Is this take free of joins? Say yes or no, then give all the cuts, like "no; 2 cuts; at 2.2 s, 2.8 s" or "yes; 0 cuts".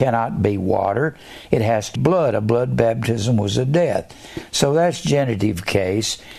no; 1 cut; at 2.0 s